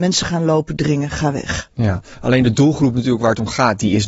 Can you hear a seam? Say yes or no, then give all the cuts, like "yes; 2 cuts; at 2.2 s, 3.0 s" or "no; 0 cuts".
no; 0 cuts